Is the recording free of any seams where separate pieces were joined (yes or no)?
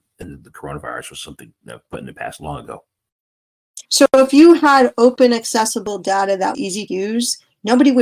no